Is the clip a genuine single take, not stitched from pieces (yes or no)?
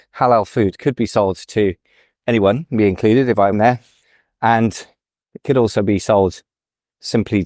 no